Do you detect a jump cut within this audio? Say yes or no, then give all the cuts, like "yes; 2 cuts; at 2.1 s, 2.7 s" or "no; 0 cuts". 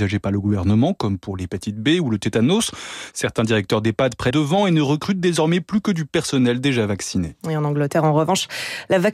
yes; 2 cuts; at 4.3 s, 7.4 s